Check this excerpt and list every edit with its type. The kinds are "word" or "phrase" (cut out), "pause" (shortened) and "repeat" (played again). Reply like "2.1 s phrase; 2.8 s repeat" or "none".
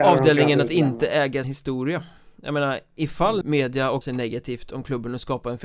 1.4 s phrase; 3.4 s word; 4.0 s phrase

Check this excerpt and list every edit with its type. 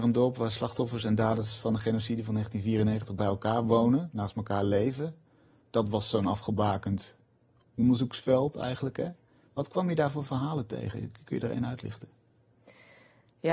none

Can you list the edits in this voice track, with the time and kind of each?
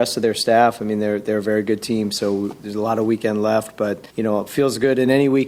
4.1 s pause

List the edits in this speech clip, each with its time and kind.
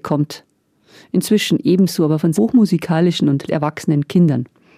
2.4 s word; 3.5 s word

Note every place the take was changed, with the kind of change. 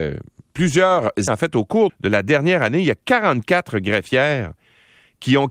1.3 s word; 1.9 s word

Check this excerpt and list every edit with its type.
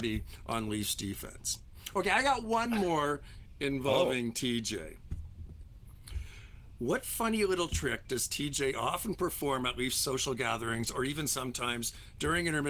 none

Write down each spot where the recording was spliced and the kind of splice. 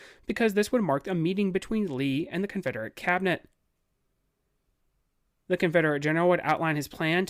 none

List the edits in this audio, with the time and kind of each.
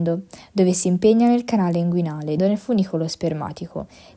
2.4 s word

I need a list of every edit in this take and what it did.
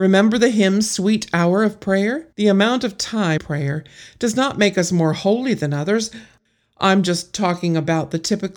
2.3 s pause; 3.4 s phrase

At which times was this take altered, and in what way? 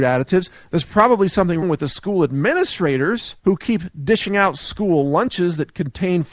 1.6 s word; 3.4 s pause

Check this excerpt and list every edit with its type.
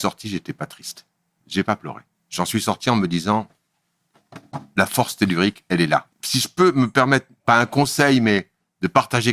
2.1 s pause; 6.1 s pause

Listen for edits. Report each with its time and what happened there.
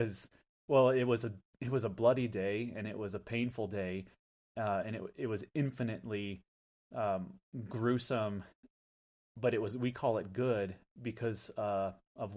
none

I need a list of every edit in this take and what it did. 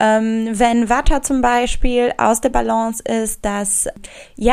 none

